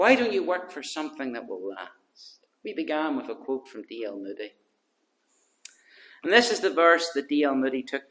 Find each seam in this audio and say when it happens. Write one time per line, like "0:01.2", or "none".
none

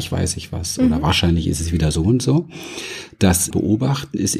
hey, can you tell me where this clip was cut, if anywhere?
0:03.5

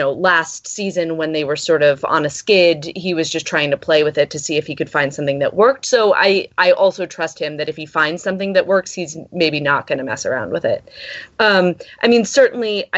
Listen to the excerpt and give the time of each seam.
none

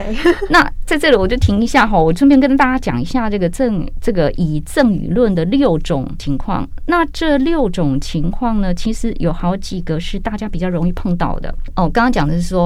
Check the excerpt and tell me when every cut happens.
none

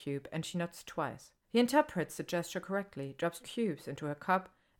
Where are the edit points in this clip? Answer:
0:01.4
0:03.4

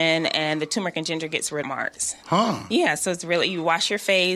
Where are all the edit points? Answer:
0:01.6

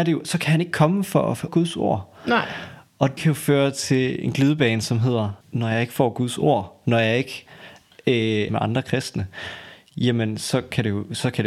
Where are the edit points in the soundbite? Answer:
0:01.5
0:03.2
0:05.4
0:08.5

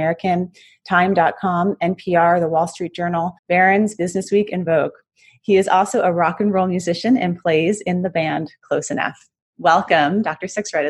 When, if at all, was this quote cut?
0:03.4

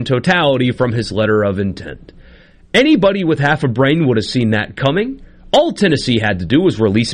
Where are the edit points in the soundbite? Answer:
none

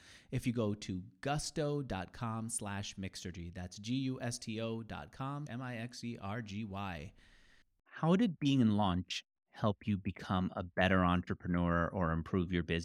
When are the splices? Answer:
0:05.5
0:07.6

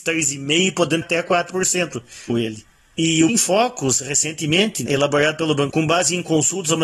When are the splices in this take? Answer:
0:01.0
0:02.3
0:03.3
0:04.9
0:05.7

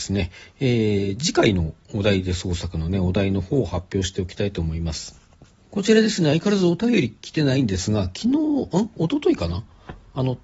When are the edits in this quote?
none

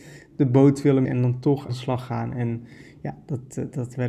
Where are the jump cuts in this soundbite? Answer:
0:01.0
0:01.7

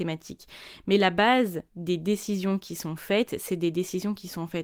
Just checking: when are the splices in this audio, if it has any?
0:01.7

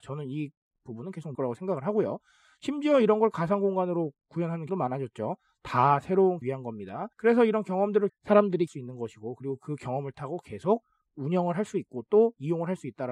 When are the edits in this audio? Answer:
0:01.3
0:04.7
0:06.4
0:07.1
0:08.1
0:08.7

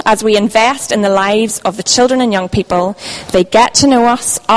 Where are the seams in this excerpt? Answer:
none

